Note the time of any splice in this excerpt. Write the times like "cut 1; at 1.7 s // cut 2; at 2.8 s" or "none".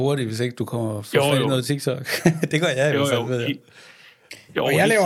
none